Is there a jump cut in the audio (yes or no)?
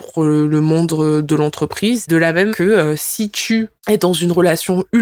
yes